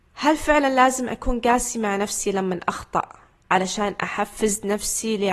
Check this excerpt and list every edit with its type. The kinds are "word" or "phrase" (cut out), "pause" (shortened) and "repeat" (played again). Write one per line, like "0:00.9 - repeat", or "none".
none